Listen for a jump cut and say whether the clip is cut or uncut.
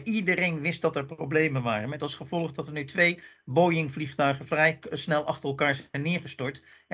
uncut